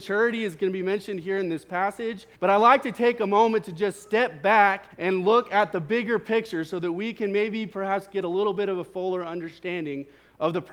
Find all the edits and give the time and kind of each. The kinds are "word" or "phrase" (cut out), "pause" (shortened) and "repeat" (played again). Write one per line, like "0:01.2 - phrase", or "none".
0:02.3 - pause
0:04.9 - pause